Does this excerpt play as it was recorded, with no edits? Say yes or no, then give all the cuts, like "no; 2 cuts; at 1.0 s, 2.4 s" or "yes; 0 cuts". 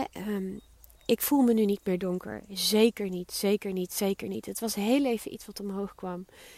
yes; 0 cuts